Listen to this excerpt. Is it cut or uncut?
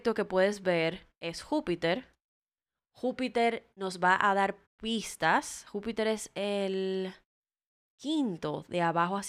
cut